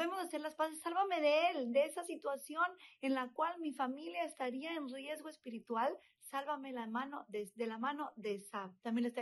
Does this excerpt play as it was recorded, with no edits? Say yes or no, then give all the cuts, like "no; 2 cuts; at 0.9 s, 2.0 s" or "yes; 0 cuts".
yes; 0 cuts